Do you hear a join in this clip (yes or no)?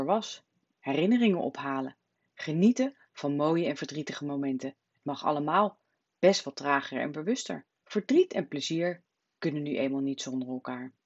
yes